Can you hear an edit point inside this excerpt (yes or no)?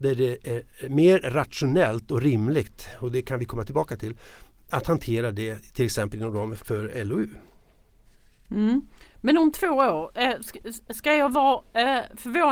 yes